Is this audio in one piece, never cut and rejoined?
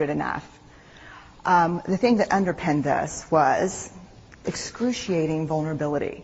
yes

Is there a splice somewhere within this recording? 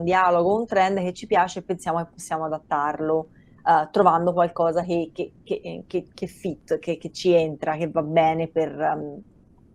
no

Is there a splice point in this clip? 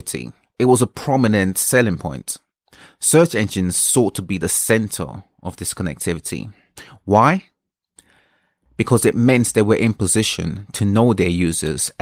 no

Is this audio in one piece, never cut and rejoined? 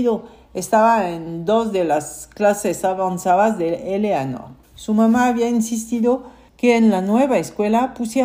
no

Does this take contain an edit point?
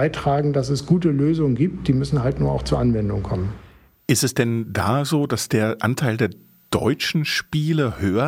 no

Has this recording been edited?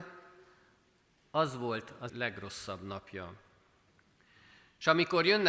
yes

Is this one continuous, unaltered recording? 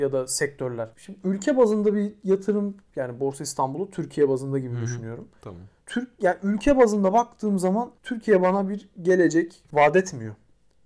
no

